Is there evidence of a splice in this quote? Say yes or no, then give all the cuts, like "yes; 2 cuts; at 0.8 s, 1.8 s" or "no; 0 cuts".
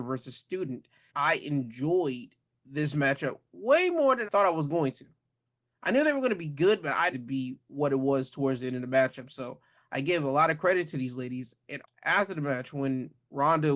yes; 4 cuts; at 1.1 s, 4.2 s, 7.1 s, 11.8 s